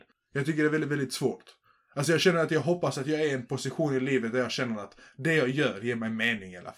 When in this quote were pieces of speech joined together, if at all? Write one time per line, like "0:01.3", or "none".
none